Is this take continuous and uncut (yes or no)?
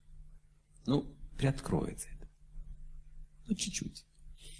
yes